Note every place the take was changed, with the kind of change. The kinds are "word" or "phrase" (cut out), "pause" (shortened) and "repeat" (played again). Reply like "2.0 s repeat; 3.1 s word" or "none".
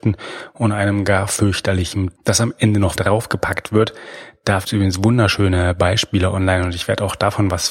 2.2 s word; 3.0 s word; 4.6 s word